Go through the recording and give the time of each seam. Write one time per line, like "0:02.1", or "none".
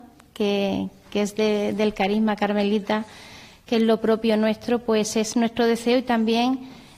none